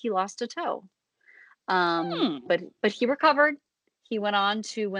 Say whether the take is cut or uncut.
uncut